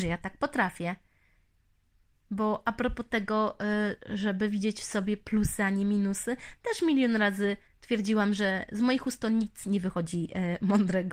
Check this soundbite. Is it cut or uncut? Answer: uncut